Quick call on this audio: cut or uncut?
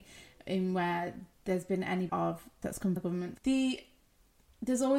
cut